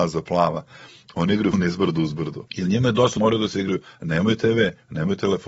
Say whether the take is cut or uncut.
cut